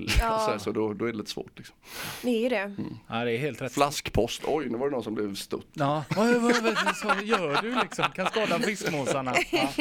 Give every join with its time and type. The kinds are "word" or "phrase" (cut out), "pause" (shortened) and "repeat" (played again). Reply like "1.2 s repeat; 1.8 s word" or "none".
none

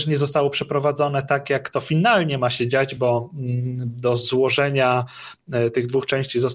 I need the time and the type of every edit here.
none

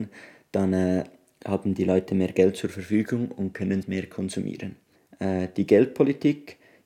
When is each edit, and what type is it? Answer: 3.8 s word; 5.0 s pause

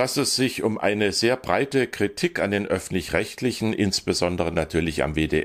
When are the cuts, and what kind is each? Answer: none

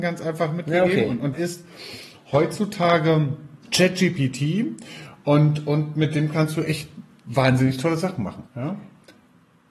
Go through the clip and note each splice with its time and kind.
1.3 s word; 3.6 s pause; 8.5 s pause

